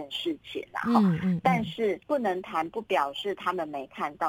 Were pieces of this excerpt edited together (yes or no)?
yes